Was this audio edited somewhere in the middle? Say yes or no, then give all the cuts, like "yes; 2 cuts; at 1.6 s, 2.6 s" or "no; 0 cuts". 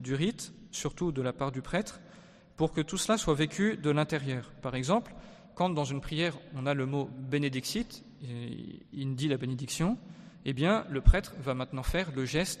no; 0 cuts